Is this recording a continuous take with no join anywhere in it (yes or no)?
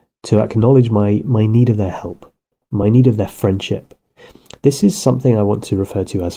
yes